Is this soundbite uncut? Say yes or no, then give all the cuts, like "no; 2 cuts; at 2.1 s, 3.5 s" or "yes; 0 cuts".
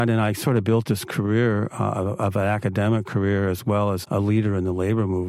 no; 1 cut; at 4.0 s